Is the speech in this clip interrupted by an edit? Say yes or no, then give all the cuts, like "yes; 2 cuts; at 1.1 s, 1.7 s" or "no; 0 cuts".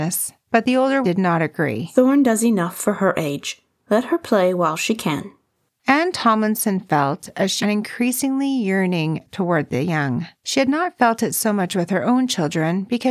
yes; 3 cuts; at 1.0 s, 7.6 s, 10.3 s